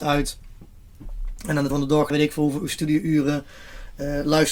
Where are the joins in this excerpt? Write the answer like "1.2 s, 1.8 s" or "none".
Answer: 1.7 s, 2.1 s